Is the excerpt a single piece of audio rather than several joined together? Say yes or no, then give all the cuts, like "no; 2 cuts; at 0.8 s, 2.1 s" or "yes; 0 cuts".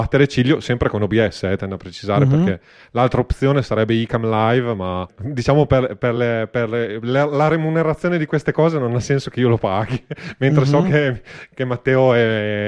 yes; 0 cuts